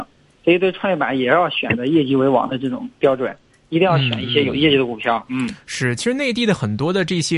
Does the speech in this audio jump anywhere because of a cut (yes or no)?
no